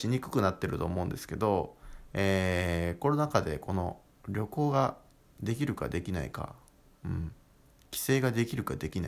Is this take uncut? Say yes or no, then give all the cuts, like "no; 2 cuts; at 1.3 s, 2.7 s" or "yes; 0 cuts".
yes; 0 cuts